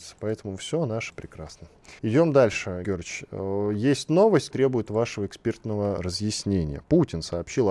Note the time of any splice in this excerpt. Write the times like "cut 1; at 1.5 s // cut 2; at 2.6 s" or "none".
cut 1; at 1.1 s // cut 2; at 2.0 s // cut 3; at 2.8 s // cut 4; at 4.5 s